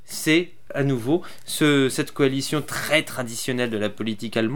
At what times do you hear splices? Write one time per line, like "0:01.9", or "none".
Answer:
none